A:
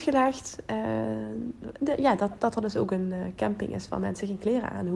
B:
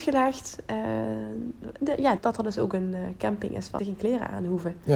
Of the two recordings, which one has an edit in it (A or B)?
B